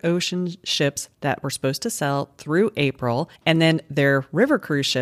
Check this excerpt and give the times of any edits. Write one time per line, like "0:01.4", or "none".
0:01.1
0:03.4

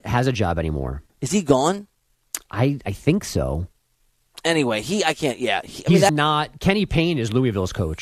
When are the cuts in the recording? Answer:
0:01.1
0:06.1

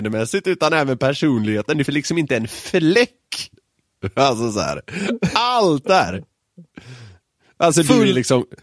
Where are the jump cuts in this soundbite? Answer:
0:01.9
0:05.8

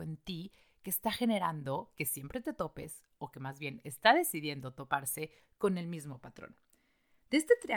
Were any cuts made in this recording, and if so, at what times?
none

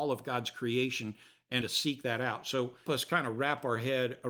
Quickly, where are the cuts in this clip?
0:01.6
0:02.9

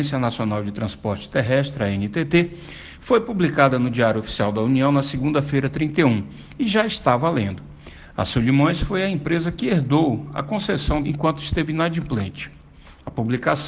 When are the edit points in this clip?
0:11.0

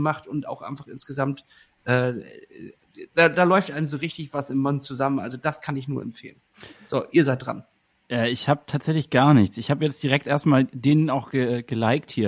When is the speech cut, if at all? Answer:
none

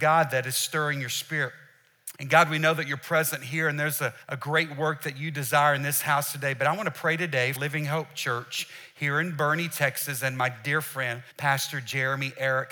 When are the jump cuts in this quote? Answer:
0:02.1
0:04.2
0:07.6
0:11.3

